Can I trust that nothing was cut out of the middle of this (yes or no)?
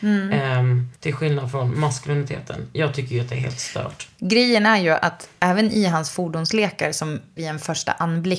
no